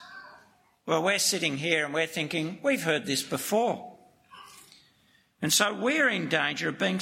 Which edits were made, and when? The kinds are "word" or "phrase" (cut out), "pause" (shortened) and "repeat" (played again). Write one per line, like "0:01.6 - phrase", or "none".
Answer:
none